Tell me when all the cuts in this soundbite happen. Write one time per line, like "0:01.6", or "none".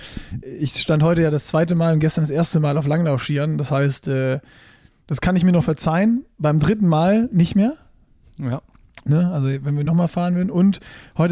none